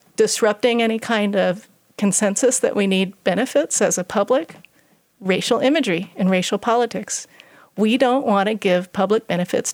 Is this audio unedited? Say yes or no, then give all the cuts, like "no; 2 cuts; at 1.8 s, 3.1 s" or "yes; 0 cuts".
yes; 0 cuts